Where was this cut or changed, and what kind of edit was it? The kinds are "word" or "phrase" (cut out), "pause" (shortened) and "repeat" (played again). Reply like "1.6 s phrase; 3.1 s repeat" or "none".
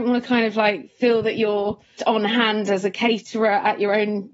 2.0 s word